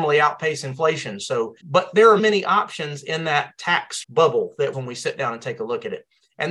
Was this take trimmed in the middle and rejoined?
yes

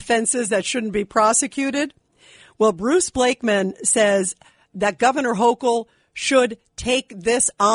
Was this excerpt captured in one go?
yes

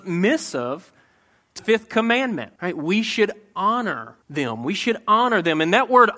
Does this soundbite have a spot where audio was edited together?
yes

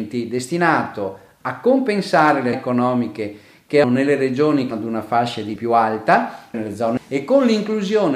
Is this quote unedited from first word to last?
no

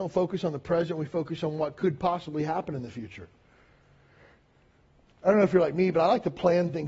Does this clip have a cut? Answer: no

